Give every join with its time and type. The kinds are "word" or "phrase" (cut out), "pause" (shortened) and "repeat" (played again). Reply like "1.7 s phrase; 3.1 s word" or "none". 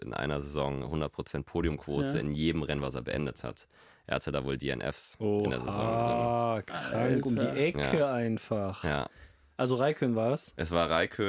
none